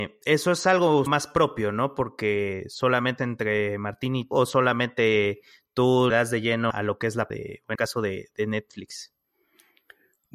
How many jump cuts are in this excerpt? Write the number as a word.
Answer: seven